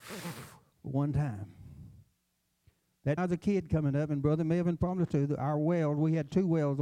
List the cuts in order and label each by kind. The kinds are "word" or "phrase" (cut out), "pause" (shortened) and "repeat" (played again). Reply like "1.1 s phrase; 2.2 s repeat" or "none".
3.2 s phrase